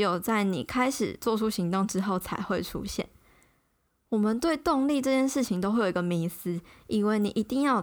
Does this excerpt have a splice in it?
no; 0 cuts

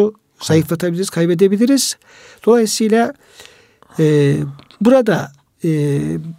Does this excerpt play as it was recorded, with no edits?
yes; 0 cuts

